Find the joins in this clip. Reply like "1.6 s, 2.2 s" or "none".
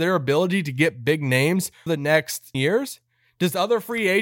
1.9 s, 2.5 s